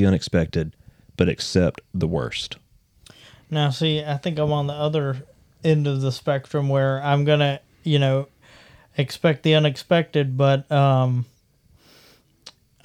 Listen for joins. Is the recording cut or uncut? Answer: uncut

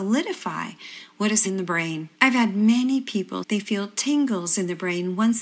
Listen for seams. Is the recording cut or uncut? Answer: cut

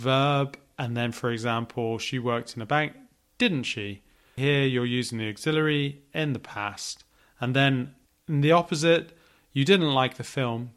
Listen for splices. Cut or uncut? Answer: uncut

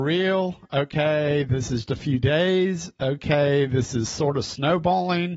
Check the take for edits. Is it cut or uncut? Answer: cut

